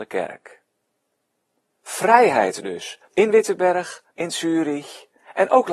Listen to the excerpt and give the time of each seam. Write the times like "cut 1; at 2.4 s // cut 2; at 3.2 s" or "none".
cut 1; at 3.0 s // cut 2; at 4.1 s